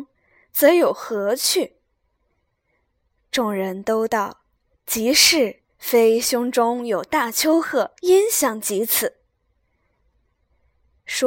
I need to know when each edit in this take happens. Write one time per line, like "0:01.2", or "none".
0:05.7
0:08.0